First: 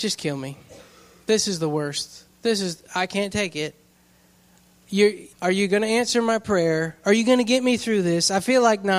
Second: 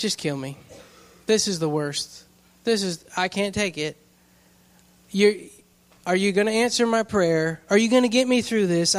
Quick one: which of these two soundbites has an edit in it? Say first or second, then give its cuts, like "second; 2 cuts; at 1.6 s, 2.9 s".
first; 2 cuts; at 2.3 s, 5.3 s